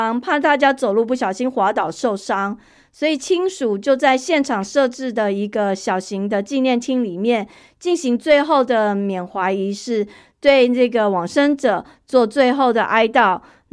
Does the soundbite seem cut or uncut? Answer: uncut